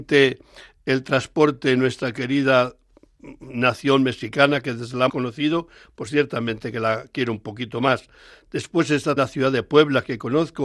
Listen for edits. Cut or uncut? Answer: cut